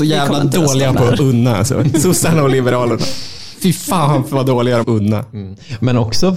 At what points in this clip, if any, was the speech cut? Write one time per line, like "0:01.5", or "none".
0:04.8